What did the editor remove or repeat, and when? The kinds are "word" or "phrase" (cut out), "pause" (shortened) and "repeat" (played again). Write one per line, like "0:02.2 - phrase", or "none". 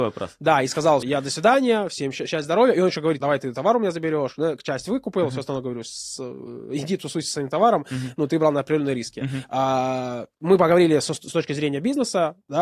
0:01.0 - phrase
0:03.2 - word
0:10.3 - pause